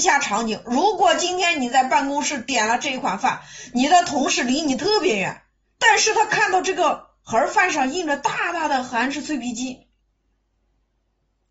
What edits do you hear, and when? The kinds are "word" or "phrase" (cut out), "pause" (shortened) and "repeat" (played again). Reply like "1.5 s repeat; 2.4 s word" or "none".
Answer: none